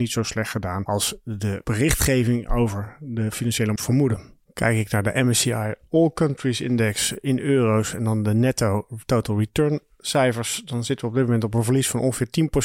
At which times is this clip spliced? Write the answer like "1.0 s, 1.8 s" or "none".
3.8 s